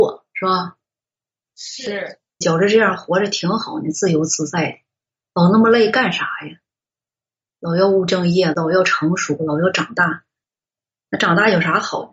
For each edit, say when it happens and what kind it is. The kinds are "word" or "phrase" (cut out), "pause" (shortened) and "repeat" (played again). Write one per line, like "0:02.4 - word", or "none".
0:02.4 - word

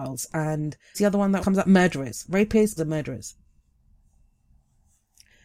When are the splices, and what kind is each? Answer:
0:00.9 - word
0:01.4 - word
0:02.8 - word

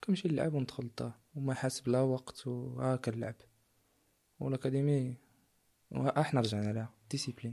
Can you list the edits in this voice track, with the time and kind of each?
0:01.3 - pause

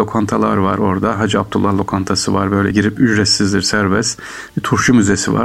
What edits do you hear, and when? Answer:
0:02.7 - word

